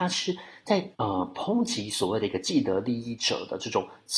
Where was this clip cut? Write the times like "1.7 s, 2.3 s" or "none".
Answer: 0.9 s